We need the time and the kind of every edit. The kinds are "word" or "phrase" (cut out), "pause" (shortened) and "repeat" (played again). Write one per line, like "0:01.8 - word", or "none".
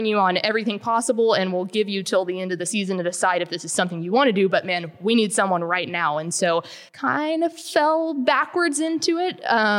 0:06.9 - pause